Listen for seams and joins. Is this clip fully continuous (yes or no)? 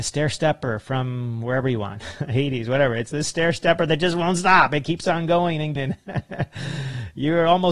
no